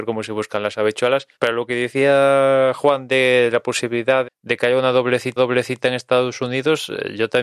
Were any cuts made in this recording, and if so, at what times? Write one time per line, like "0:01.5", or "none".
0:01.3
0:04.2
0:05.4